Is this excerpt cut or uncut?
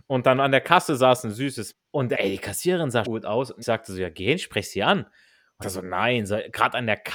cut